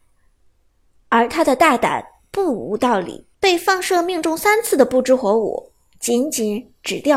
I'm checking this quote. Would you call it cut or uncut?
cut